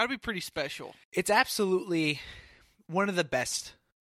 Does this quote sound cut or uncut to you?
cut